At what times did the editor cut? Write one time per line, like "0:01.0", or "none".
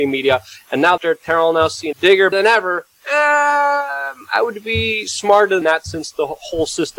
0:01.0
0:01.9
0:02.3
0:02.9
0:05.6